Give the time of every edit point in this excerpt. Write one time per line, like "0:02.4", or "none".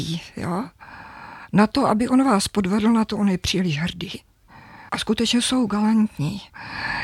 0:04.9